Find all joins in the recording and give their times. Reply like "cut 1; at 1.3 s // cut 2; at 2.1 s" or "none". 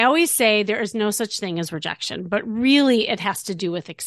none